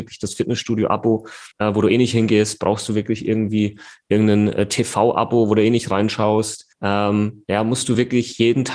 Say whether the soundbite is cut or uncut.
cut